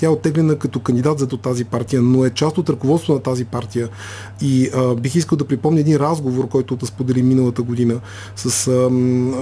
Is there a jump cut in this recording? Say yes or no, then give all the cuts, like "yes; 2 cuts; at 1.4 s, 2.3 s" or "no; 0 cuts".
yes; 2 cuts; at 1.3 s, 6.8 s